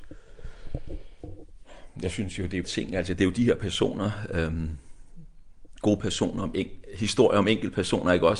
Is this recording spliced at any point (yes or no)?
yes